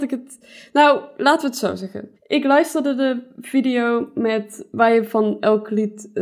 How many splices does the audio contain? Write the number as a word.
one